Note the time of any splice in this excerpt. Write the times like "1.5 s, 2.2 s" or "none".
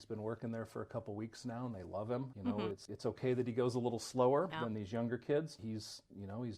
none